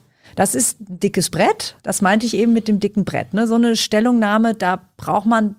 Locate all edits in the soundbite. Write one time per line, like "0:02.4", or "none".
0:01.8